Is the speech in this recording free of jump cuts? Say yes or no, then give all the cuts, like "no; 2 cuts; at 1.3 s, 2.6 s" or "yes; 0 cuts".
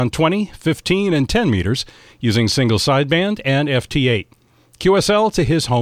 yes; 0 cuts